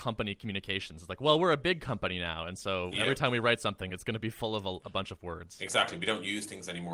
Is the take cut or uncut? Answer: uncut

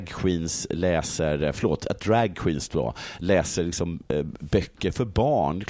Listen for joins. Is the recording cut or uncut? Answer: uncut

